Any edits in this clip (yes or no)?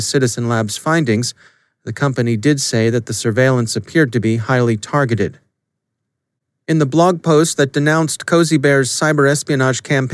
no